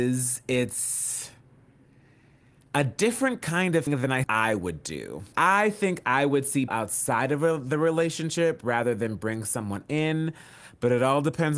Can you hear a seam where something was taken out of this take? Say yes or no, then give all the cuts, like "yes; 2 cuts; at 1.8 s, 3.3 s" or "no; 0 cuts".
yes; 4 cuts; at 3.9 s, 4.2 s, 5.3 s, 6.7 s